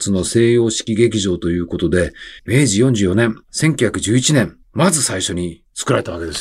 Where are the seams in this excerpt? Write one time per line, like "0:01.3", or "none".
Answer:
0:02.4
0:03.4
0:04.6